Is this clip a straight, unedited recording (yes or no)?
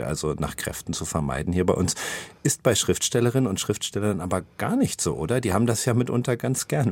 yes